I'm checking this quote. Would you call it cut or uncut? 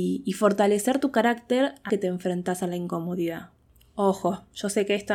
cut